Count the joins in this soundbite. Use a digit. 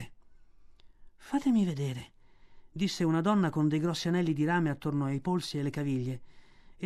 0